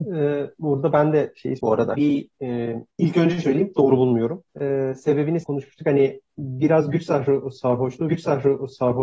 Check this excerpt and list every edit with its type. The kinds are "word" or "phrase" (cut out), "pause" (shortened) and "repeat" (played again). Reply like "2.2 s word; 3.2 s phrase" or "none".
1.6 s word; 1.9 s word; 2.9 s pause; 3.4 s word; 4.5 s pause; 5.4 s phrase; 8.1 s repeat